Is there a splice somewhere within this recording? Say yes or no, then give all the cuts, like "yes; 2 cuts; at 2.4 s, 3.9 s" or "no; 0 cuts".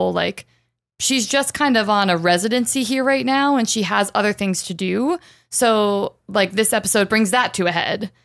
no; 0 cuts